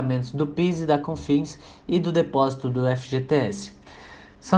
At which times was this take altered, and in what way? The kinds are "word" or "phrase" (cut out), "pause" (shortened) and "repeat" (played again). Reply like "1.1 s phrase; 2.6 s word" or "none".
none

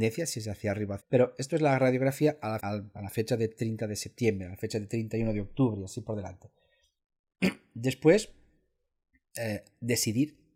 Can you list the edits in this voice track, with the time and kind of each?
1.0 s phrase; 2.6 s word

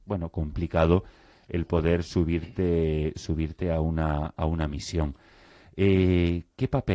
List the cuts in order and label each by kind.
none

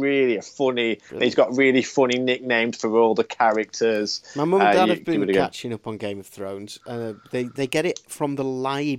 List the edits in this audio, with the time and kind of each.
none

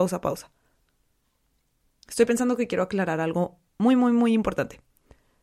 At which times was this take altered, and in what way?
none

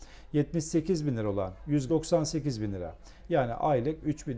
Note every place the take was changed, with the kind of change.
1.9 s phrase

